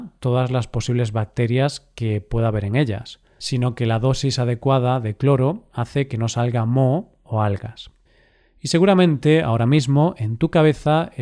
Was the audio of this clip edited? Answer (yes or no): no